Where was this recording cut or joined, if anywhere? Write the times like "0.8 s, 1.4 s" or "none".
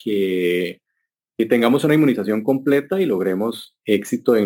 none